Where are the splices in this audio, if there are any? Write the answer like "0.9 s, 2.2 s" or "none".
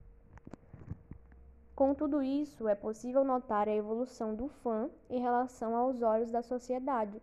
none